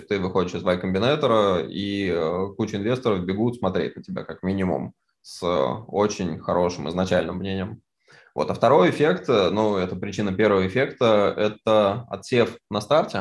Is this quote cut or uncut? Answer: uncut